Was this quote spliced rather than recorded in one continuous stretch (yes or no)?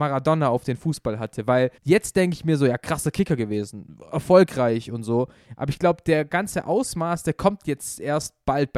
yes